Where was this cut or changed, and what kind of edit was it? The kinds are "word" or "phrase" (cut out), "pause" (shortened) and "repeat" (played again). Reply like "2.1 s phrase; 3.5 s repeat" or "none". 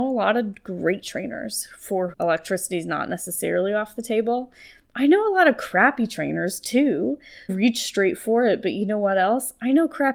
2.1 s word; 7.5 s word